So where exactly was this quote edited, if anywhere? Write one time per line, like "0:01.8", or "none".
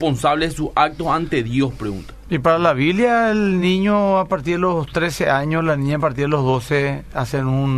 none

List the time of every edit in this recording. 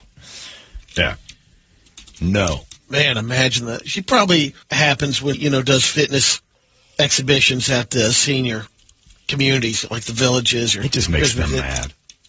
0:02.8
0:04.6
0:05.3

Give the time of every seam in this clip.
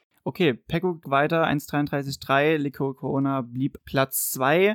0:01.0
0:03.8

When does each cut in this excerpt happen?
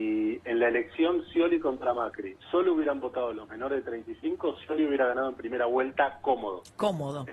0:02.4

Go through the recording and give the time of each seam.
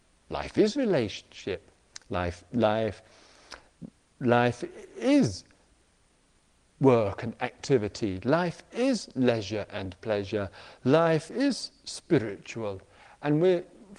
none

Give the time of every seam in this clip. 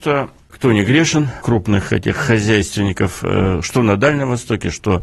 0:01.4

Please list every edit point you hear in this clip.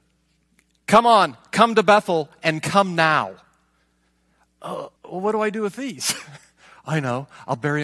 0:05.0

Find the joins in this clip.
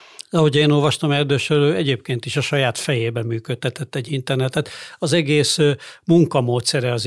none

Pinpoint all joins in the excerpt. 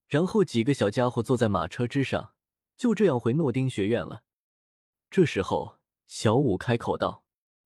none

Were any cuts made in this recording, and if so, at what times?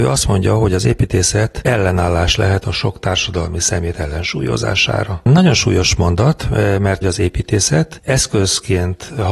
0:07.0

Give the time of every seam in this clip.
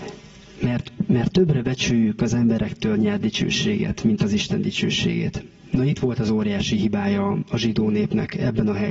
none

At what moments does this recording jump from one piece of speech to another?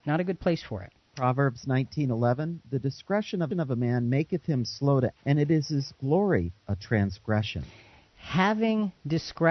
0:01.1
0:03.5
0:05.1
0:06.7

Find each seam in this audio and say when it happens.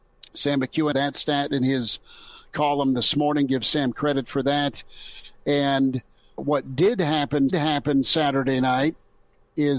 0:00.9
0:06.4
0:07.5

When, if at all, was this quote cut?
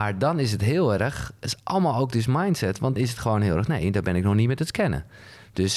0:03.0

